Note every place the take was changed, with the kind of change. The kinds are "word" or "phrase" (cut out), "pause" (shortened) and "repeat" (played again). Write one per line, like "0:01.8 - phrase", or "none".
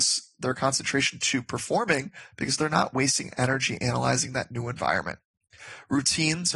none